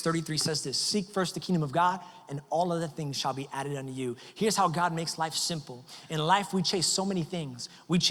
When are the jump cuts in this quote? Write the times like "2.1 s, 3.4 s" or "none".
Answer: none